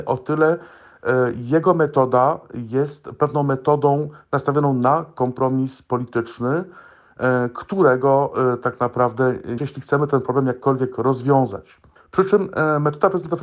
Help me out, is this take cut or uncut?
cut